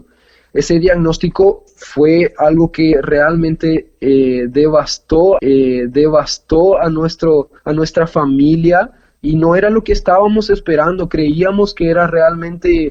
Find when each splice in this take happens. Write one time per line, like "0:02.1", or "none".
0:05.4
0:07.6

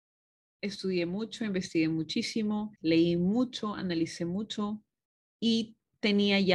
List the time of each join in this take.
0:02.7
0:05.0

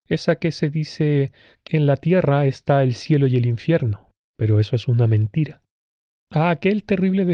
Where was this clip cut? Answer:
0:01.7

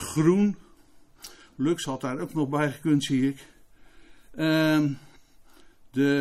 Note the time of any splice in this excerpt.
none

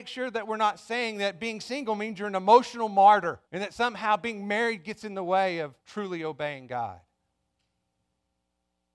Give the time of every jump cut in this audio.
0:03.4
0:05.8

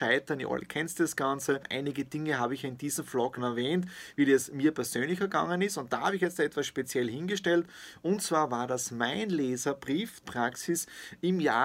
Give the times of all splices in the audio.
0:03.4
0:10.2

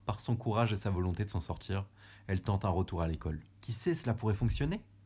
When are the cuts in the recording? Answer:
0:03.5

